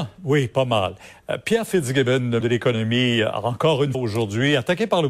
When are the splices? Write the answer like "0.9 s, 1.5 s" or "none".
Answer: 2.4 s, 3.9 s